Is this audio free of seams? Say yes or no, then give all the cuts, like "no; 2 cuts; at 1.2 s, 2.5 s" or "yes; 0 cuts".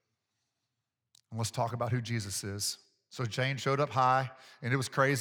yes; 0 cuts